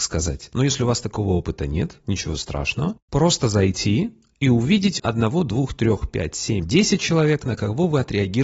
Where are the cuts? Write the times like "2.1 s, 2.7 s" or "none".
5.0 s, 6.6 s